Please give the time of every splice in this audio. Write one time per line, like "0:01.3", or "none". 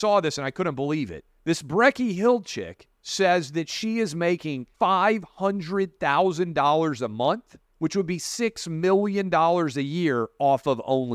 0:01.3
0:03.0
0:04.7
0:07.7